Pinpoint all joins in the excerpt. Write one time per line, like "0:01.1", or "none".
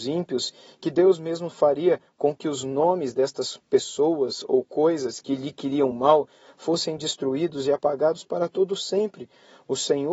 none